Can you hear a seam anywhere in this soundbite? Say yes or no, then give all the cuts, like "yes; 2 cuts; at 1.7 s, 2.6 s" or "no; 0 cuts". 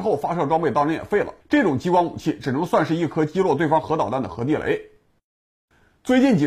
yes; 1 cut; at 1.4 s